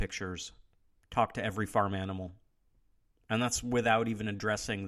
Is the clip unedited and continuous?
yes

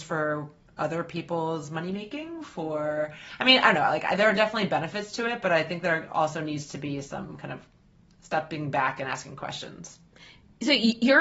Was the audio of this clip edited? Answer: no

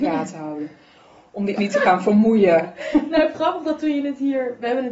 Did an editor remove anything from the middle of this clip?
yes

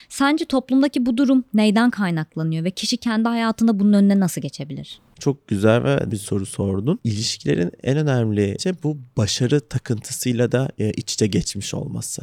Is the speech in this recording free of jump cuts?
no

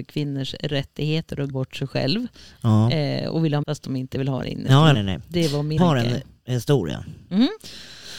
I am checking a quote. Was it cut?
yes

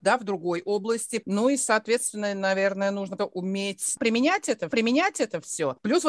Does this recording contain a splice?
yes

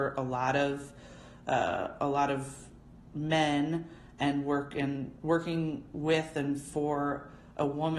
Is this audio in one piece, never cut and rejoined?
yes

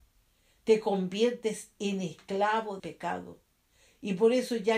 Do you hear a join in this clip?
yes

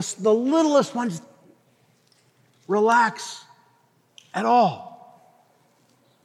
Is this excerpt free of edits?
yes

